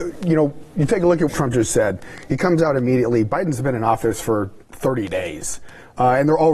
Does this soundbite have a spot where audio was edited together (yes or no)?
yes